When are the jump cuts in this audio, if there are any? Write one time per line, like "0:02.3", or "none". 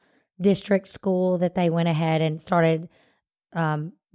none

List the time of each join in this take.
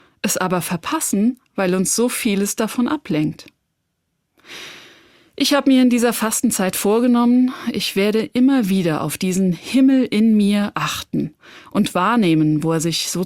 none

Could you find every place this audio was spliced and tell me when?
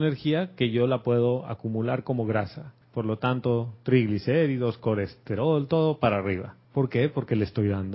0:02.8
0:06.6

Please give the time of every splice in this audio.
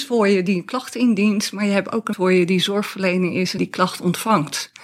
0:02.1
0:03.6

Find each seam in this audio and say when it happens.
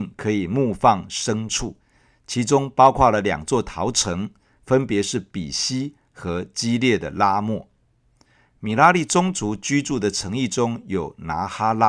none

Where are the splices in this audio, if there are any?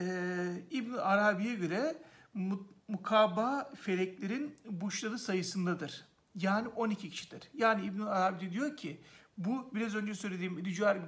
none

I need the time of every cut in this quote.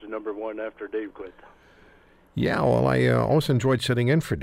0:01.1

